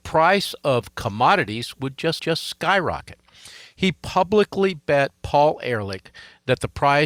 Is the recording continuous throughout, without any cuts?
no; 1 cut; at 2.2 s

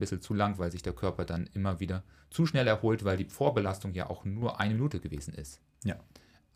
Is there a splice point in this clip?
no; 0 cuts

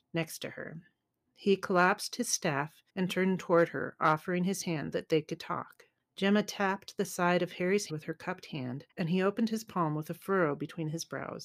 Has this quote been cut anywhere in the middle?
yes; 3 cuts; at 2.9 s, 4.9 s, 7.9 s

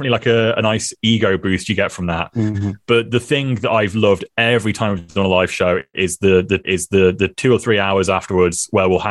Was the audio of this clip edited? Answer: yes; 1 cut; at 6.6 s

